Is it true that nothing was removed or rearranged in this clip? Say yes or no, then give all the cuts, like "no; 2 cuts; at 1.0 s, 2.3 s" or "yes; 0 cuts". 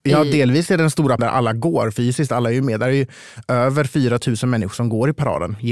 no; 1 cut; at 1.2 s